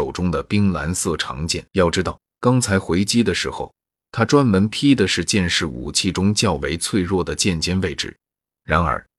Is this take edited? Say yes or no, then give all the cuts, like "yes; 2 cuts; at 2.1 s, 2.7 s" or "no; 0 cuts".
yes; 2 cuts; at 1.7 s, 2.3 s